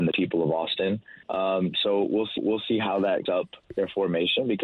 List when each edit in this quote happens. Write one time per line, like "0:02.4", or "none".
0:01.2
0:02.4
0:03.3
0:03.6

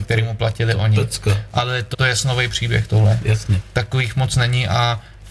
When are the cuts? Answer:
0:01.9

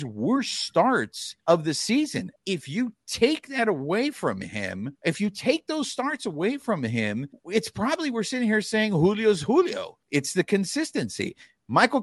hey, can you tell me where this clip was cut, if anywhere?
0:01.4
0:02.4
0:05.0
0:07.3
0:10.0

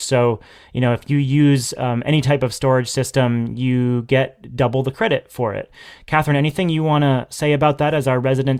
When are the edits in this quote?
none

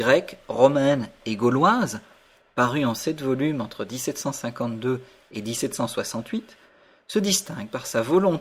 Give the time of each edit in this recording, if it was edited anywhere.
none

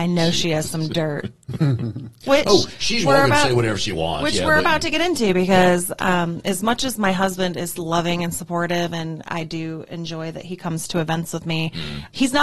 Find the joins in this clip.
none

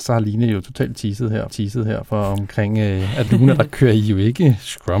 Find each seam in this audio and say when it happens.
0:01.5
0:03.3

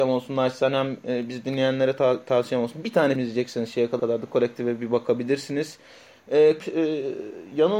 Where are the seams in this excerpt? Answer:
0:03.2
0:04.0
0:06.6

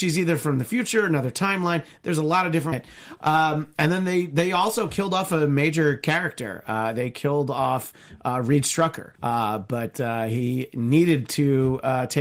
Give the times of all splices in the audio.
0:02.7
0:09.1

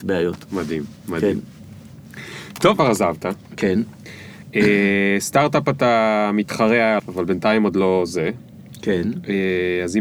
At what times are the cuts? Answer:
0:02.8
0:07.0

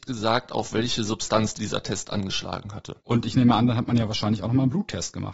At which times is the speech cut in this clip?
0:03.0

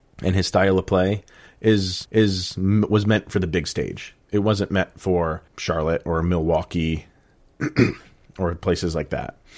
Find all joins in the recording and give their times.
0:02.0
0:05.5

